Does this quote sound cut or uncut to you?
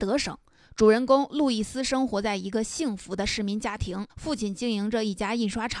cut